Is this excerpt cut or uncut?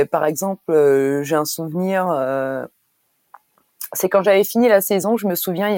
uncut